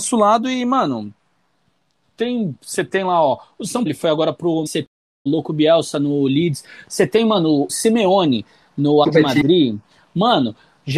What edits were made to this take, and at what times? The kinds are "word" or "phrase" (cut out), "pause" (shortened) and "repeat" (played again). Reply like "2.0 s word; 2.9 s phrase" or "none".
3.9 s word; 4.7 s word; 5.3 s word; 7.7 s word; 9.0 s word